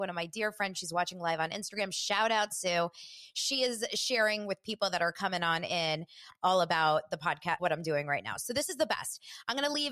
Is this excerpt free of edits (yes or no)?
no